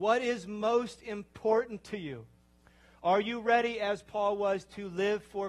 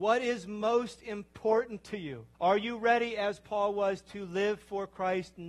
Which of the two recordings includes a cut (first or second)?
second